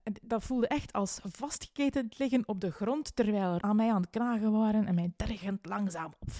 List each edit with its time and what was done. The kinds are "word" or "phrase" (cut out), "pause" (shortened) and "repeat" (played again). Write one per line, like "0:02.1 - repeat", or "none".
0:03.6 - word